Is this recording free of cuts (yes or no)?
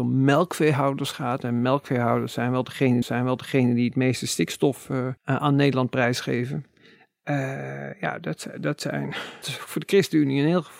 no